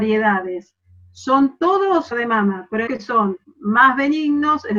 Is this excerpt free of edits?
no; 3 cuts; at 2.1 s, 2.9 s, 3.4 s

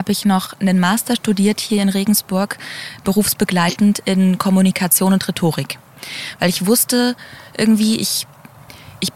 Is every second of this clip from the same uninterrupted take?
yes; 0 cuts

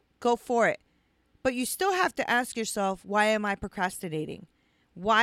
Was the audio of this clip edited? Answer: no; 0 cuts

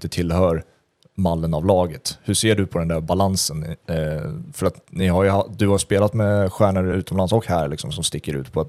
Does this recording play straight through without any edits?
yes; 0 cuts

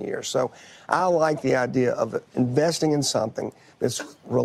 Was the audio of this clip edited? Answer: no; 0 cuts

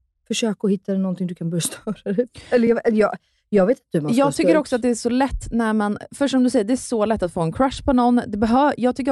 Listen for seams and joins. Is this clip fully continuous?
yes; 0 cuts

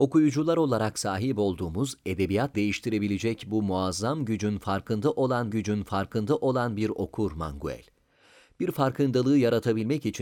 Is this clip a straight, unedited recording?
no; 2 cuts; at 2.5 s, 5.5 s

